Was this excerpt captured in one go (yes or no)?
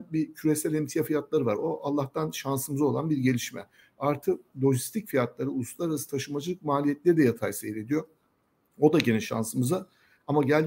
yes